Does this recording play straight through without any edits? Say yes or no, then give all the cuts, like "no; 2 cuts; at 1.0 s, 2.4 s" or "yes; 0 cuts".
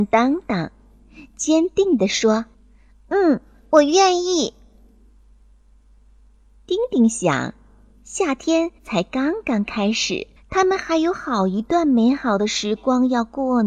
no; 3 cuts; at 2.5 s, 8.8 s, 10.4 s